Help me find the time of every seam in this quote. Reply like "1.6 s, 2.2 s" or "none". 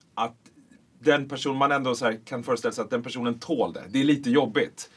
none